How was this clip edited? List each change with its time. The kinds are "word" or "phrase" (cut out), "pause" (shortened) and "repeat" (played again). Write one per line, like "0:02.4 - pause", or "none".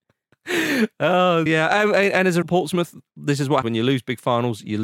0:01.5 - word
0:02.4 - word
0:03.6 - word